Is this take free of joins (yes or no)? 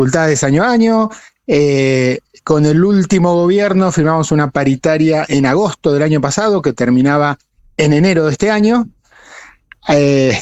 yes